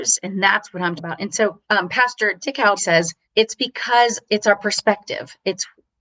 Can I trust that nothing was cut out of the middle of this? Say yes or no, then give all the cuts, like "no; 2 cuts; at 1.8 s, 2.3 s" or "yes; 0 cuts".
no; 4 cuts; at 1.0 s, 1.6 s, 2.8 s, 3.2 s